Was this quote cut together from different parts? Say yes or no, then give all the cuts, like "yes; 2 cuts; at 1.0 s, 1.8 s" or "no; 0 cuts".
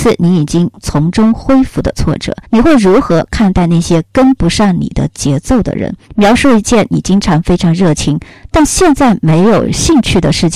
yes; 2 cuts; at 2.4 s, 6.0 s